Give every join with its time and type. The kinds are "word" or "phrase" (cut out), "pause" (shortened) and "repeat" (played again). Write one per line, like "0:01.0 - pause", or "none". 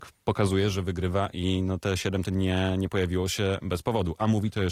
0:02.3 - word